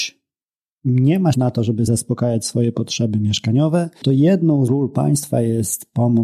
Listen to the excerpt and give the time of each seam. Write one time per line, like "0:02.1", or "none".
0:01.3
0:01.9
0:04.0
0:04.7